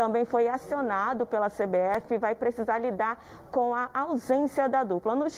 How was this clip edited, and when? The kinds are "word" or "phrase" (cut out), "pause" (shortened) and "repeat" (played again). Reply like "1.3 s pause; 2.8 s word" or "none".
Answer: none

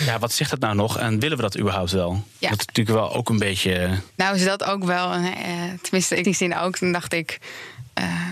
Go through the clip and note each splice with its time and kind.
4.1 s pause; 6.2 s word

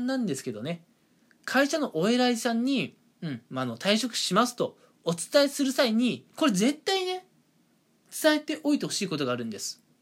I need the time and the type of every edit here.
6.3 s pause

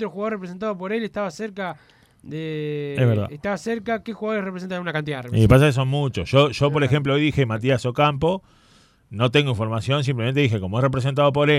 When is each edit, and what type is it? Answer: none

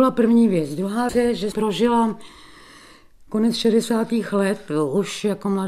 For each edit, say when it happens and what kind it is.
1.1 s word; 1.5 s word

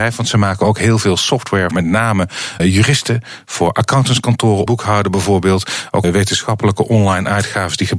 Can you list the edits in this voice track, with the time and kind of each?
1.7 s word; 2.6 s word; 4.7 s word; 6.0 s word

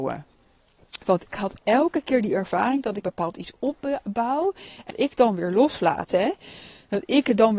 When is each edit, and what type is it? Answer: 1.3 s word; 3.0 s word; 4.9 s word

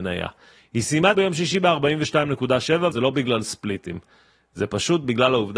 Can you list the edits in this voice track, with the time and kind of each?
1.1 s word; 2.9 s word

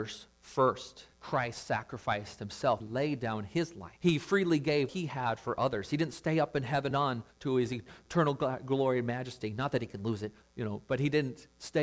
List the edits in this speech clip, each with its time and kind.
1.1 s pause; 2.8 s word; 4.0 s pause; 4.9 s word; 6.9 s word; 7.3 s pause; 10.4 s word

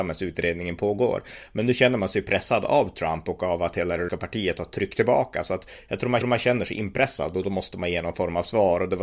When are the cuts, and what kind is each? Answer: 4.1 s word; 6.2 s repeat

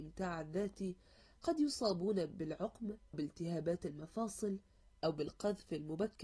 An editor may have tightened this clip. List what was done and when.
3.1 s word

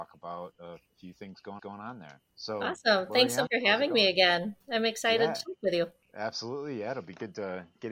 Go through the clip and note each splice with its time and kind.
1.6 s repeat; 2.3 s pause; 3.5 s word; 6.0 s pause

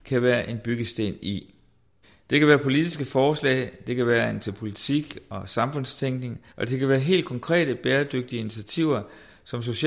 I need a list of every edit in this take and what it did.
2.0 s pause; 4.4 s word; 6.5 s pause

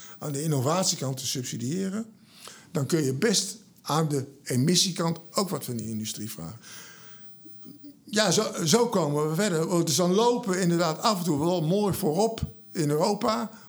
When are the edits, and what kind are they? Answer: none

